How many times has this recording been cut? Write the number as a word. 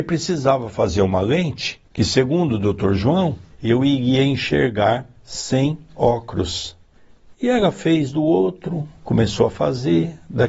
two